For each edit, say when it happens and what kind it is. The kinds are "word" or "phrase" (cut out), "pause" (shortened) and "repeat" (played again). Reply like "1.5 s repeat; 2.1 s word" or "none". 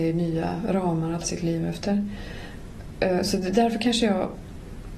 1.2 s word